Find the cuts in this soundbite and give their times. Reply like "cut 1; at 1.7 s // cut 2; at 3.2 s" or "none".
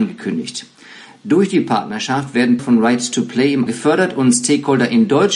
cut 1; at 2.6 s // cut 2; at 3.7 s